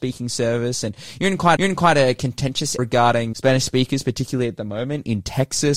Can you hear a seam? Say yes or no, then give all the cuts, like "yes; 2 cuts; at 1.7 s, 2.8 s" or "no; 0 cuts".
yes; 3 cuts; at 1.6 s, 2.8 s, 3.3 s